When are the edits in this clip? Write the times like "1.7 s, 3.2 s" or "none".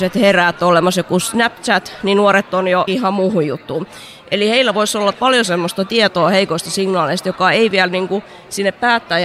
2.9 s, 5.1 s